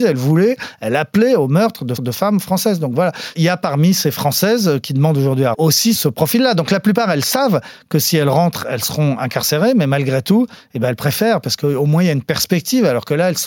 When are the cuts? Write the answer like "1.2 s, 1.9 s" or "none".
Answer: 2.0 s, 5.5 s, 5.9 s

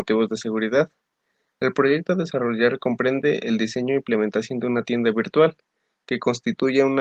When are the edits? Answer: none

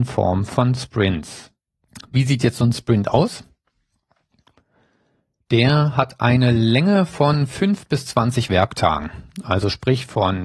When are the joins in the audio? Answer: none

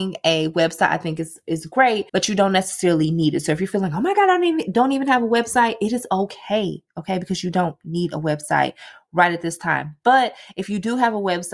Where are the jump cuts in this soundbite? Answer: 2.1 s

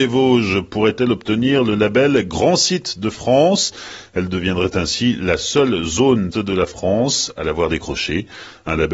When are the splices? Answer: 6.3 s

